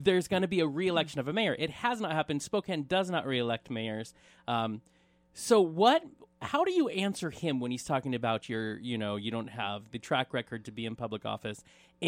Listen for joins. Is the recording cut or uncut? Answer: cut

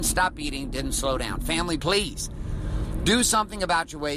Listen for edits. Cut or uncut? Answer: cut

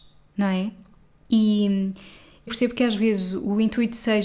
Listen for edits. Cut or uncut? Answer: cut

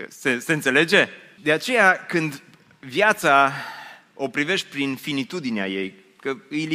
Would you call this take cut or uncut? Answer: uncut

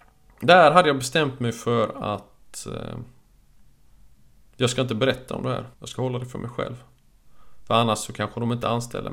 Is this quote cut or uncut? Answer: cut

